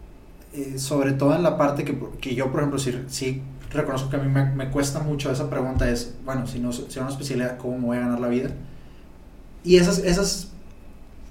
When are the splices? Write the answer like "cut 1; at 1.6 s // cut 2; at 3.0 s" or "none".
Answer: none